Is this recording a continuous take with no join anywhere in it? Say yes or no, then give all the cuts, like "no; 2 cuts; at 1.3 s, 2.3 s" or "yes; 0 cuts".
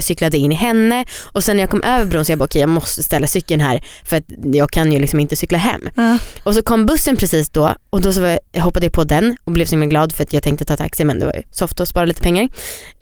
yes; 0 cuts